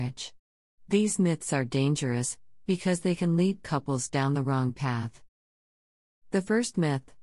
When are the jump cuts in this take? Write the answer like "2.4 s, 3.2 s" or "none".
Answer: none

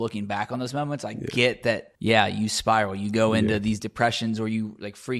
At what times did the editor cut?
1.9 s, 3.8 s

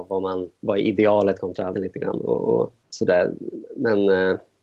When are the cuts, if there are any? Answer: 1.7 s, 2.8 s

